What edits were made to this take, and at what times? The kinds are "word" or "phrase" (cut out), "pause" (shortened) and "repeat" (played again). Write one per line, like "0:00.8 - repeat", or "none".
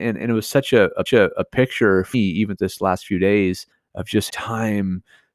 0:01.1 - repeat
0:02.1 - word
0:02.6 - word
0:03.7 - pause
0:04.3 - word